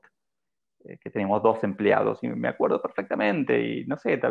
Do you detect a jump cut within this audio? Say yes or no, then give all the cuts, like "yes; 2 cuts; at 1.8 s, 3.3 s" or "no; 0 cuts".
no; 0 cuts